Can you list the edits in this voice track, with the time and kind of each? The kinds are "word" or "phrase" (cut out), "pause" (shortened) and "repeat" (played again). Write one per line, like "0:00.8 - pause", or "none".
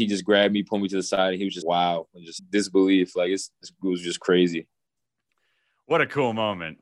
0:01.6 - word
0:02.4 - word